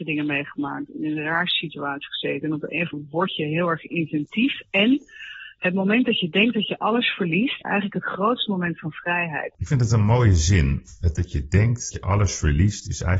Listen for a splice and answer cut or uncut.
cut